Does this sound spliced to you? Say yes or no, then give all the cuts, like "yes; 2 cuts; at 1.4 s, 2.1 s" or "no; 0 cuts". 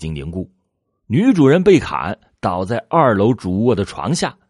no; 0 cuts